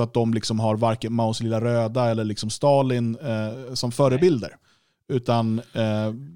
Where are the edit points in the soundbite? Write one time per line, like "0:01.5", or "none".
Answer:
none